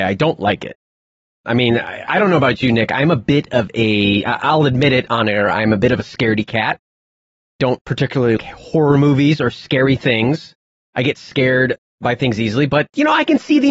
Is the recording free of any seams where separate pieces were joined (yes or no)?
no